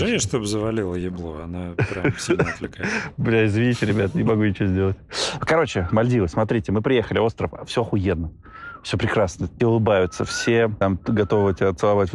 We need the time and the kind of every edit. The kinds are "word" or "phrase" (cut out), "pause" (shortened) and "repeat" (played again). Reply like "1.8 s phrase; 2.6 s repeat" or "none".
9.6 s word